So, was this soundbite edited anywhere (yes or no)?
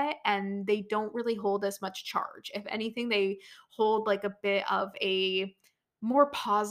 no